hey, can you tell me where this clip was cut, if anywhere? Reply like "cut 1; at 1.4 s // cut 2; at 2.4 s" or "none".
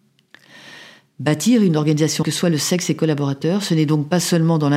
cut 1; at 2.2 s